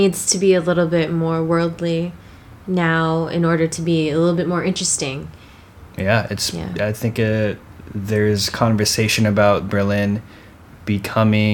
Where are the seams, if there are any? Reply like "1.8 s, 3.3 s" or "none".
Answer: none